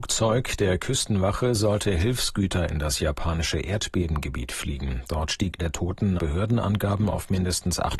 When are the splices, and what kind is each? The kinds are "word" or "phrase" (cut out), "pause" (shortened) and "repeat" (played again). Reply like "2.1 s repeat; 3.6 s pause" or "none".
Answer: 5.6 s phrase; 6.2 s word

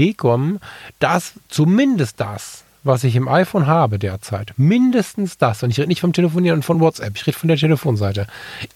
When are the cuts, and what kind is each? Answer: none

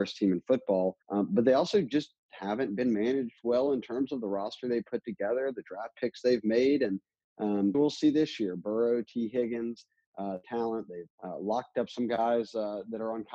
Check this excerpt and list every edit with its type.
1.0 s pause; 7.7 s word; 10.4 s phrase; 11.1 s pause

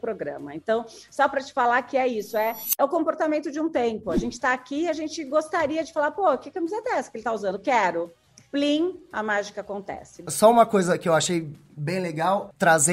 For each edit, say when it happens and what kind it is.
none

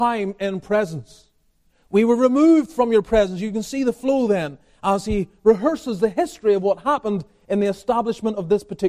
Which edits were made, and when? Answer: none

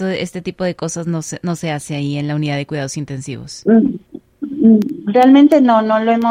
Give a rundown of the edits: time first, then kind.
none

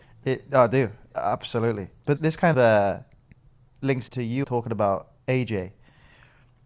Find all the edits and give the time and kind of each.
1.1 s word; 2.2 s word; 2.5 s word; 4.1 s word; 4.4 s word; 5.2 s word

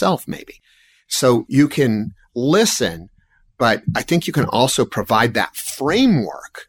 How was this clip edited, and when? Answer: none

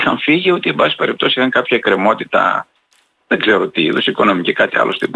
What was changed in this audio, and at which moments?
none

